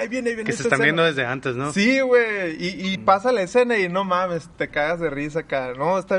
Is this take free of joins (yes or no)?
no